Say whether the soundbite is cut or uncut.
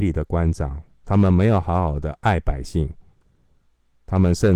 uncut